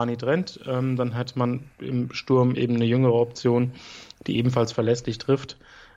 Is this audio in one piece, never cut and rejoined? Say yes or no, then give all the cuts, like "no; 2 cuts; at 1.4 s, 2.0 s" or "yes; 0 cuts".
no; 1 cut; at 1.7 s